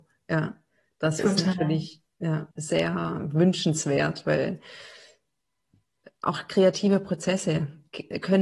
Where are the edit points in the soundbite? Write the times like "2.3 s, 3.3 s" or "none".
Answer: 2.5 s